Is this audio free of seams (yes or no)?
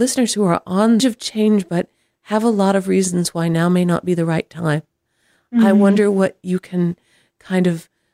no